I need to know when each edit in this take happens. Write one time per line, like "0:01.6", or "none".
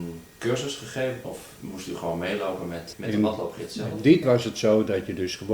0:01.2
0:02.9
0:04.2

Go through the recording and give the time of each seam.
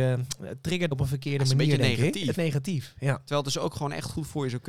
0:00.9
0:02.3

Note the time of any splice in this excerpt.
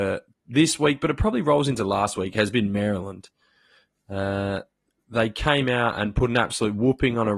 none

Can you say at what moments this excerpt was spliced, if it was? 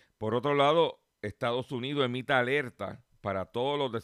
0:01.1

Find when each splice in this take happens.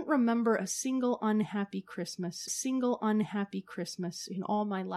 0:02.5

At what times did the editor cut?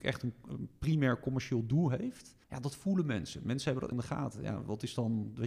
0:02.4
0:03.9

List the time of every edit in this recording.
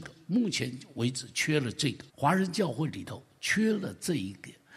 0:02.1

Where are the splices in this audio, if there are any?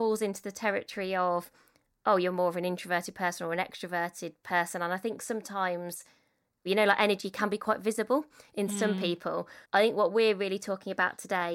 0:09.6

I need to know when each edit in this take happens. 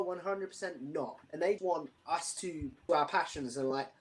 0:01.2
0:01.6
0:02.0
0:02.9

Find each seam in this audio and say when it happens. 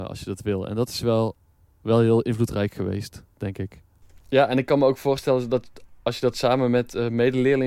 none

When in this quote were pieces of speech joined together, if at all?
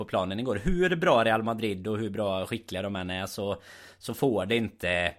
none

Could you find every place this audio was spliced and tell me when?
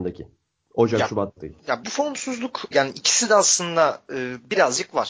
0:01.4
0:01.8
0:02.7

